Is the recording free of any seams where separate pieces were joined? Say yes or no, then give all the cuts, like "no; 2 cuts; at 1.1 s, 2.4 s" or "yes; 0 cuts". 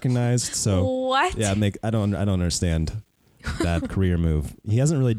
no; 1 cut; at 3.8 s